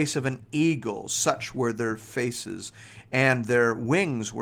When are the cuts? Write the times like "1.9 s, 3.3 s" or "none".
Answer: none